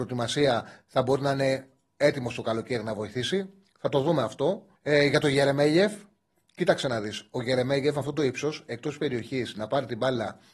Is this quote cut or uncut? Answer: cut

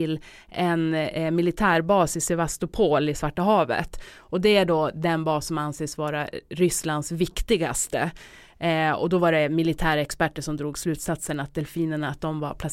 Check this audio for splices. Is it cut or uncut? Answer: uncut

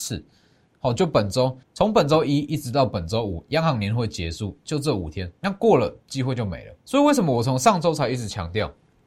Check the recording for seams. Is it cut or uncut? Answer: cut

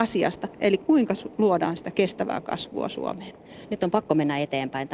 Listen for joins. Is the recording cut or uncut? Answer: uncut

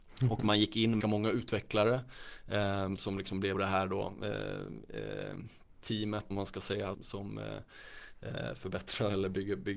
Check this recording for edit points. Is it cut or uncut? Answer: cut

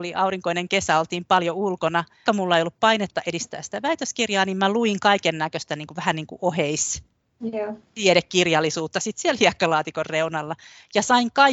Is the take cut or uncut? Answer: cut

